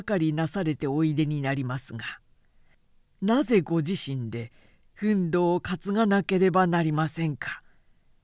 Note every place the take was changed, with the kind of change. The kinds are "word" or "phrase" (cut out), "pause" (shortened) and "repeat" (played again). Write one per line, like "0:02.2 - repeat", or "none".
none